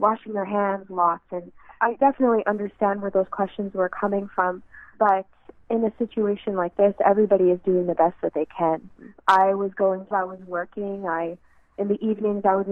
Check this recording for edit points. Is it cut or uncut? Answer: cut